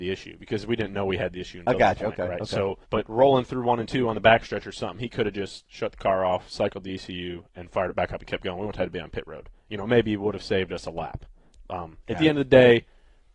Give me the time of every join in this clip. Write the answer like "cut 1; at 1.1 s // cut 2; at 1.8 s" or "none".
cut 1; at 2.8 s